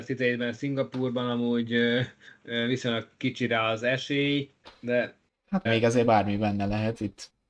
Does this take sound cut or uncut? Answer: cut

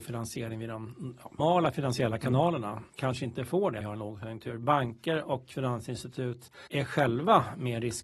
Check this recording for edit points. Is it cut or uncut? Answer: cut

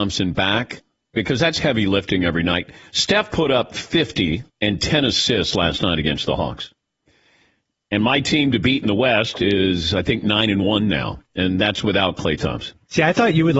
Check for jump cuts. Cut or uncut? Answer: cut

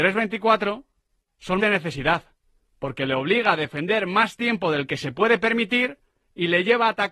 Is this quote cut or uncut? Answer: cut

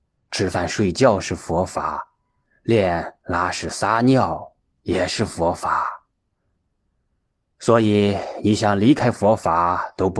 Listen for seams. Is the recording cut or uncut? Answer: uncut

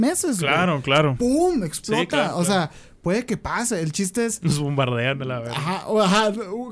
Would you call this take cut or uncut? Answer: uncut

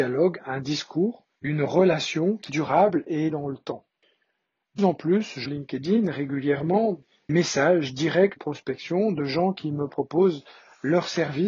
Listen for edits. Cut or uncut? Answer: cut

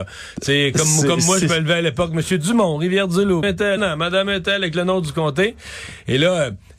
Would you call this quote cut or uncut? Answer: cut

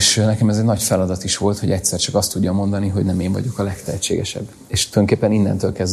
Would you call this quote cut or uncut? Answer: uncut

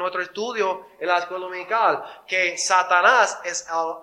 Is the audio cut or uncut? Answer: uncut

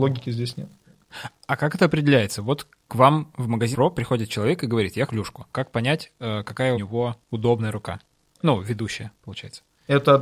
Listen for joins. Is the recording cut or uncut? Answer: cut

